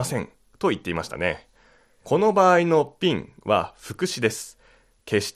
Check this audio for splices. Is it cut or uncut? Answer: uncut